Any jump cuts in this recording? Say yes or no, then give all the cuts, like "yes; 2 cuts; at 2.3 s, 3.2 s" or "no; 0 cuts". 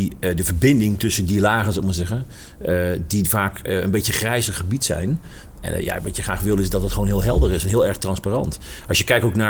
no; 0 cuts